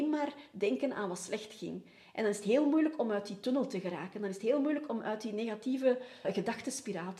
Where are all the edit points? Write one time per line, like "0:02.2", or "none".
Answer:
0:06.2